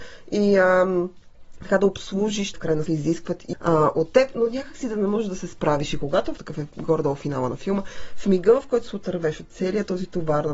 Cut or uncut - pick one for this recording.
cut